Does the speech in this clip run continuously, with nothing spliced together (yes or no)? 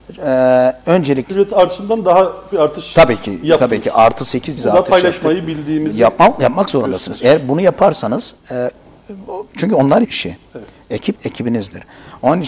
no